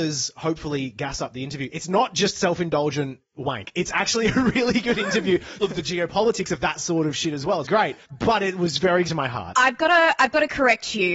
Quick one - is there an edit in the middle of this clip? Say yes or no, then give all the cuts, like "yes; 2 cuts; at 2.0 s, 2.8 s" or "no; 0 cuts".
yes; 4 cuts; at 5.6 s, 7.6 s, 8.0 s, 9.1 s